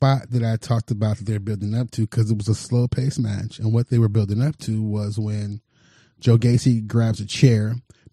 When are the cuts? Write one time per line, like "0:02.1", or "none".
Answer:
none